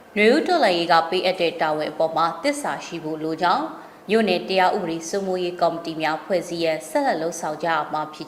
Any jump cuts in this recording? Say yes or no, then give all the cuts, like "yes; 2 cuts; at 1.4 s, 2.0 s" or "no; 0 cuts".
yes; 1 cut; at 4.0 s